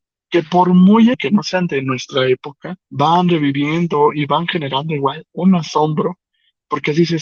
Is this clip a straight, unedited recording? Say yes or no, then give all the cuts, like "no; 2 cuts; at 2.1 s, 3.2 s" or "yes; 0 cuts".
no; 2 cuts; at 1.1 s, 2.8 s